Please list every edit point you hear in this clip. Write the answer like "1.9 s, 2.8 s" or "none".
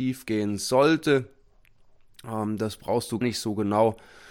3.2 s